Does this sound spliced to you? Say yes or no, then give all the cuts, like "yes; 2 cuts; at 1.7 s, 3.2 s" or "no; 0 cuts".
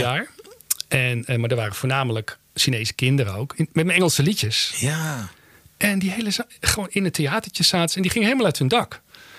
no; 0 cuts